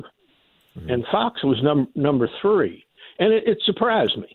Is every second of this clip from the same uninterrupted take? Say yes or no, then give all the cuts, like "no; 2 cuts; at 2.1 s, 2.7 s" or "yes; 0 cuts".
yes; 0 cuts